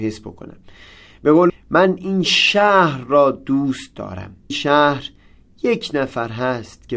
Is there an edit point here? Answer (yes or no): yes